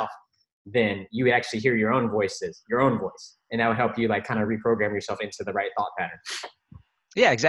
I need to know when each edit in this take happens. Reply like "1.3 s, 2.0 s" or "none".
3.4 s